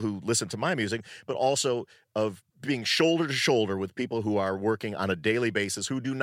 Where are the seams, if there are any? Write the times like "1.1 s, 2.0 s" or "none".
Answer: 2.5 s